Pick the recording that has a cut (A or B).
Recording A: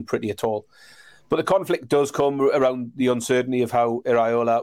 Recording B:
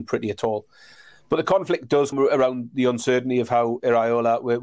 B